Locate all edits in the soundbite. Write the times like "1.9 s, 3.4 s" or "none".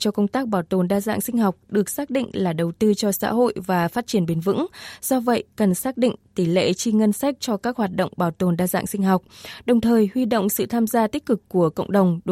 none